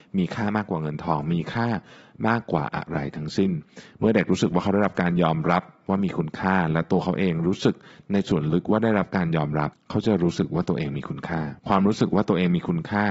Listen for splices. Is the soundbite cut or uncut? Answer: cut